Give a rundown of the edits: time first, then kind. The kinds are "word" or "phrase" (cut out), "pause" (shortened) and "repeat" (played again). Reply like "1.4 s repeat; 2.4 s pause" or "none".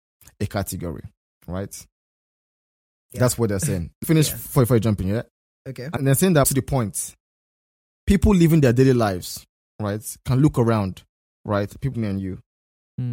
4.0 s word; 6.0 s word; 6.4 s word; 11.9 s word

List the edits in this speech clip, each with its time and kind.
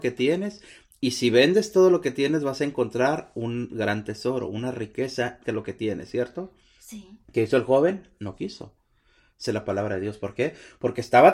5.4 s word; 7.2 s pause; 9.5 s phrase

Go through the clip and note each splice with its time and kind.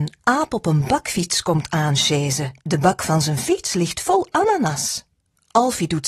2.6 s pause

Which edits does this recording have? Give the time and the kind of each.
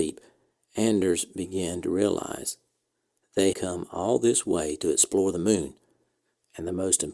3.5 s word

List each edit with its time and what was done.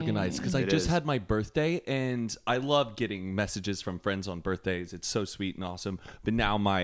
none

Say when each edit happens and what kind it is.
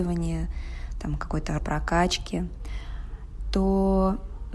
1.6 s word

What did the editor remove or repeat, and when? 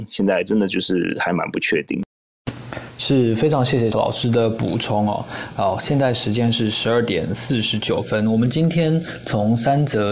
3.9 s word

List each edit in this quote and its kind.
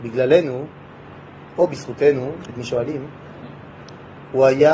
2.5 s word

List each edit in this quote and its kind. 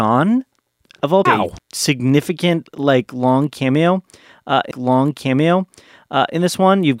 1.3 s phrase; 1.6 s word; 4.7 s repeat

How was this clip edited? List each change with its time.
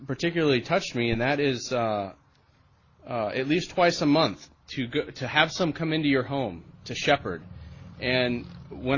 none

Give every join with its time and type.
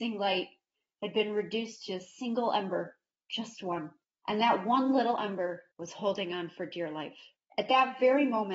3.2 s pause; 5.7 s pause

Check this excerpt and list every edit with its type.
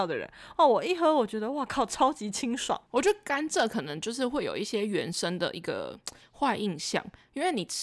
none

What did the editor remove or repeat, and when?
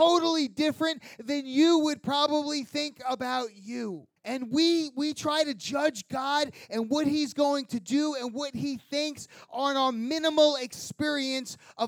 4.2 s pause

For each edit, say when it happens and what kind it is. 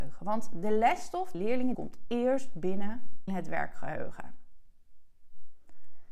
1.3 s phrase; 1.7 s word; 3.3 s word

